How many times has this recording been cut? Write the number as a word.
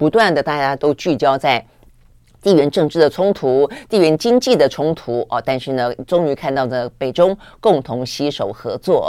zero